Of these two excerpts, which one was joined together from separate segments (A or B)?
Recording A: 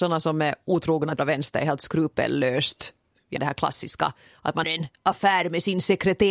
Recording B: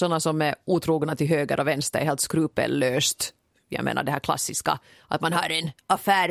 A